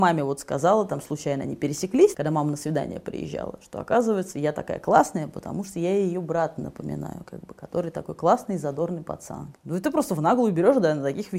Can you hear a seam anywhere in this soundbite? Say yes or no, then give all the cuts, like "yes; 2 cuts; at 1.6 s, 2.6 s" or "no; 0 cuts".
no; 0 cuts